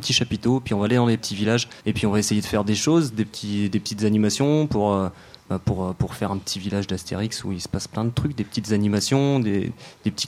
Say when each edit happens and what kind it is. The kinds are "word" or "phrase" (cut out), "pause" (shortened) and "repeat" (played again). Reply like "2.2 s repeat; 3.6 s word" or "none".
1.8 s pause